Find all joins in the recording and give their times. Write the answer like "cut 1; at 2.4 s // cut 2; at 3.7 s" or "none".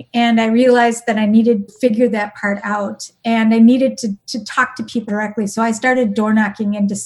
cut 1; at 1.7 s // cut 2; at 4.2 s // cut 3; at 5.1 s

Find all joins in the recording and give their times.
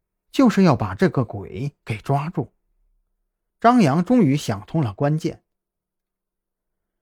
none

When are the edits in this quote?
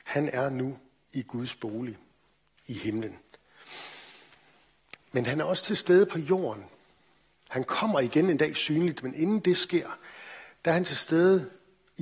none

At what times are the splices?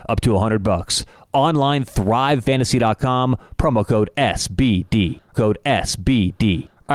cut 1; at 5.3 s

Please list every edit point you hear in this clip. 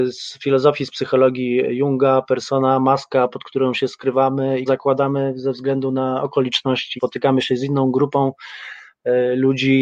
cut 1; at 4.7 s // cut 2; at 7.0 s

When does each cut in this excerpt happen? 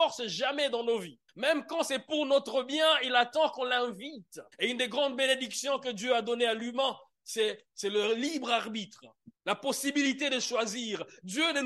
cut 1; at 1.3 s // cut 2; at 4.5 s // cut 3; at 7.7 s // cut 4; at 9.4 s

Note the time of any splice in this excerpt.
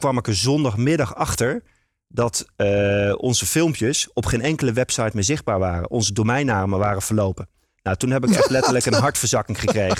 none

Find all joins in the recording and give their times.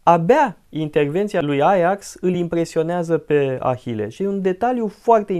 none

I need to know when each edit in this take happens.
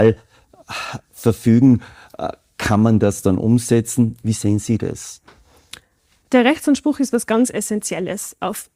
none

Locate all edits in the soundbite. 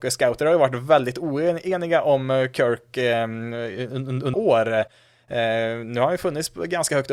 cut 1; at 4.3 s

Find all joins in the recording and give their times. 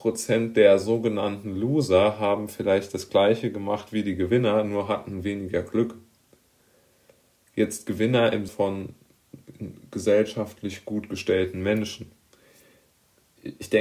cut 1; at 8.5 s

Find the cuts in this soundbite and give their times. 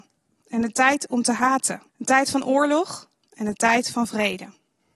cut 1; at 1.9 s

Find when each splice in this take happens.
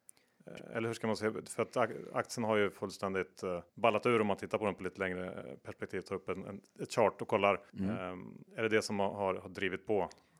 cut 1; at 3.7 s // cut 2; at 7.7 s // cut 3; at 8.5 s

